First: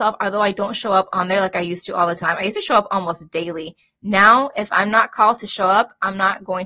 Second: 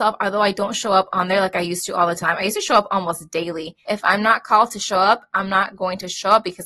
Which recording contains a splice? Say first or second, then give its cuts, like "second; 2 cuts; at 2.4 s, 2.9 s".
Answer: second; 1 cut; at 3.8 s